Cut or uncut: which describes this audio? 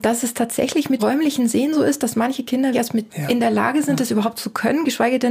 cut